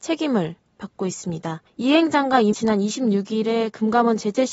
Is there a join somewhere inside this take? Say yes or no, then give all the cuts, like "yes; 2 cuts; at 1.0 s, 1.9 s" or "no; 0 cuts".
yes; 2 cuts; at 1.7 s, 2.5 s